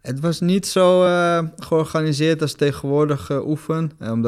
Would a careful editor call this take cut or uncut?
uncut